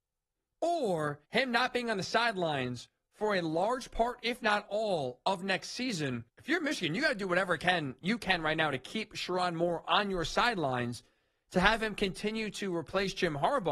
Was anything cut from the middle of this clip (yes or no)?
yes